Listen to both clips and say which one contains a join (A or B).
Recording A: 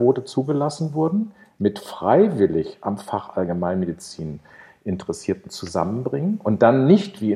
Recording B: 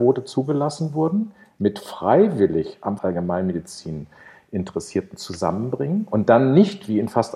B